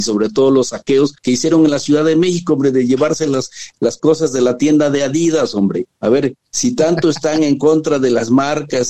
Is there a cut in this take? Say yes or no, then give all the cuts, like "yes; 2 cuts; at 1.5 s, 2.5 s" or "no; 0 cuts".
yes; 2 cuts; at 1.2 s, 6.0 s